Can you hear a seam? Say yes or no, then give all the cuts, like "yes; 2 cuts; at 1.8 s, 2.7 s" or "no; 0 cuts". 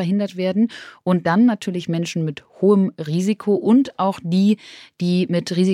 no; 0 cuts